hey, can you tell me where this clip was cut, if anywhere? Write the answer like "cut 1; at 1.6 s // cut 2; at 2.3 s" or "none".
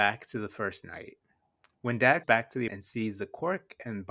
cut 1; at 2.2 s // cut 2; at 2.7 s